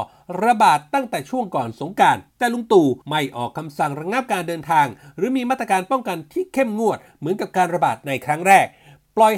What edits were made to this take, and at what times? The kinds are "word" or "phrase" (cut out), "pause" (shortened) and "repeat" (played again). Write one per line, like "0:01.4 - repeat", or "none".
0:02.3 - pause
0:03.0 - pause

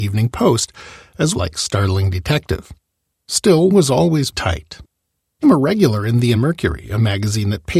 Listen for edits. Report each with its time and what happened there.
0:01.3 - phrase
0:03.7 - word
0:04.3 - word
0:05.4 - word
0:06.3 - word

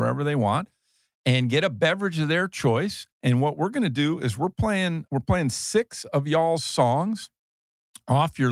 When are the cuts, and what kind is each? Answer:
0:03.1 - pause
0:05.1 - word

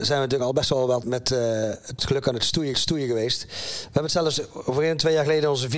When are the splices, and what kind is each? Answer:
0:01.0 - word
0:02.0 - word
0:02.7 - repeat

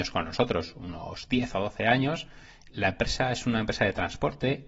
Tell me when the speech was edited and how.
none

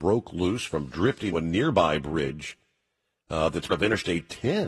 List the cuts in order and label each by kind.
0:01.3 - word
0:03.7 - word

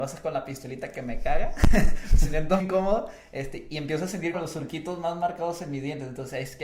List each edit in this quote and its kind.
0:02.6 - word
0:04.3 - word

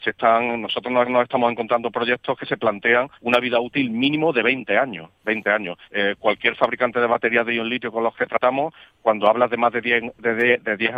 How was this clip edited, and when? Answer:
0:01.0 - repeat
0:03.1 - pause
0:05.2 - pause
0:05.8 - pause

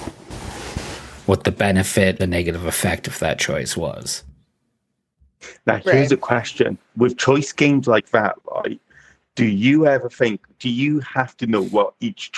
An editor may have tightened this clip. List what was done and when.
0:02.2 - phrase

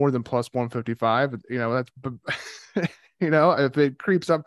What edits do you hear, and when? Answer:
none

